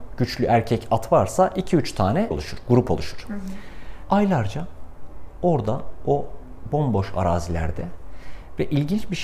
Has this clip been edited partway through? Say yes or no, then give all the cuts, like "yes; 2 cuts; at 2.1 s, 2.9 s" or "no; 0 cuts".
yes; 2 cuts; at 2.3 s, 4.1 s